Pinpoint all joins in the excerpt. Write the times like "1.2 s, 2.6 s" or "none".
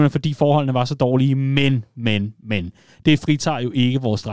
none